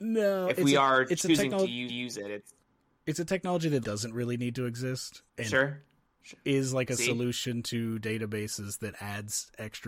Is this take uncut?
no; 3 cuts; at 1.9 s, 3.8 s, 5.3 s

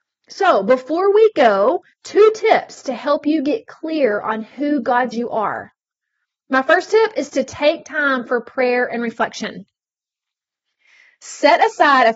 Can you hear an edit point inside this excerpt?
yes; 2 cuts; at 1.9 s, 5.1 s

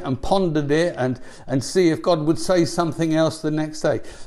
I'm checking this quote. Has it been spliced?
no; 0 cuts

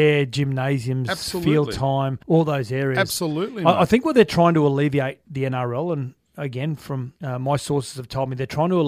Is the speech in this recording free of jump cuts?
no; 2 cuts; at 2.2 s, 7.2 s

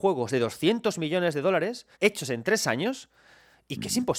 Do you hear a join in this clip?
yes; 1 cut; at 1.9 s

